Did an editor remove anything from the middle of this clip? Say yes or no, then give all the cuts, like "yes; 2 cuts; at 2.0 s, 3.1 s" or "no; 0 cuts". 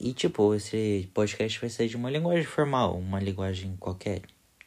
no; 0 cuts